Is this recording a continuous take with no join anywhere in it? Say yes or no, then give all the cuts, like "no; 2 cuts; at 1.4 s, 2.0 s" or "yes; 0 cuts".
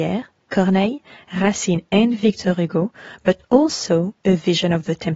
yes; 0 cuts